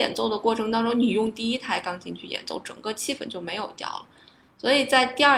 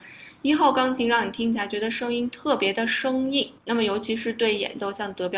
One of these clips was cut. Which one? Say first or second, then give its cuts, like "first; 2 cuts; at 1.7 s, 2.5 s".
second; 1 cut; at 3.6 s